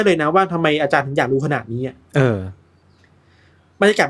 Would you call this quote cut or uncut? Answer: cut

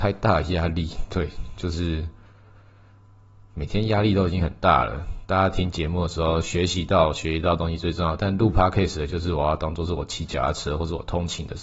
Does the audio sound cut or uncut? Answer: uncut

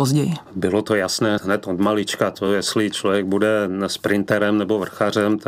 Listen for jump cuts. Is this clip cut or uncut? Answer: uncut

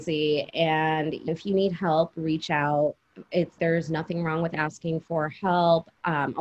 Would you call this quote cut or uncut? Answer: cut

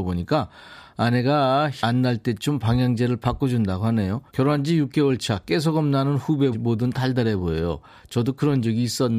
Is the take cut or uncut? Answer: cut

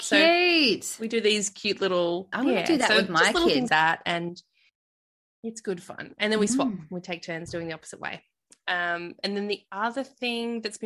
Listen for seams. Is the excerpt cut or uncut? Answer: cut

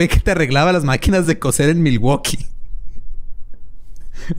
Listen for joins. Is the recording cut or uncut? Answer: uncut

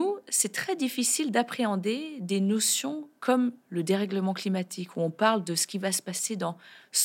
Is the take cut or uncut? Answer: uncut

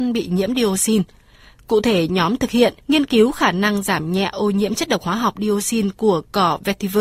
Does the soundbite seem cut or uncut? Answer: cut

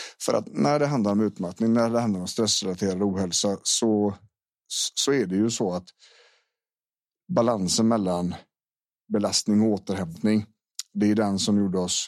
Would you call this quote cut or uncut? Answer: uncut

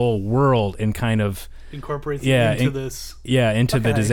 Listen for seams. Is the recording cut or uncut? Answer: uncut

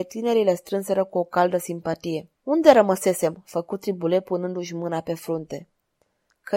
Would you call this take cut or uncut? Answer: cut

